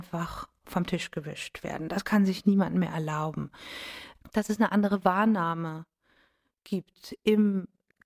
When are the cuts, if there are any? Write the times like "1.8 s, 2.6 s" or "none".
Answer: none